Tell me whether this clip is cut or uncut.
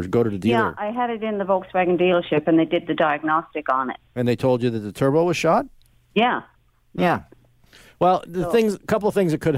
uncut